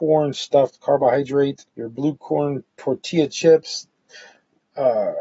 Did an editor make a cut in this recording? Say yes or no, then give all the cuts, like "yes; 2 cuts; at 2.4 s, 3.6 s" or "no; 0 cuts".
yes; 1 cut; at 1.7 s